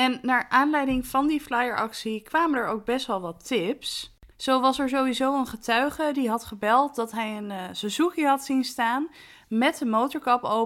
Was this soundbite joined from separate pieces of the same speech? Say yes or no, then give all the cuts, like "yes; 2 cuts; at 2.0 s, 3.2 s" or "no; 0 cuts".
yes; 1 cut; at 4.3 s